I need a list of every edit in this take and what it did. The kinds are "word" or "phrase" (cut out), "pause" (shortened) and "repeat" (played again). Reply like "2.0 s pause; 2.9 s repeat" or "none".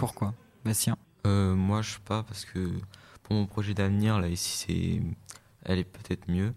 1.0 s pause; 2.0 s word; 4.2 s word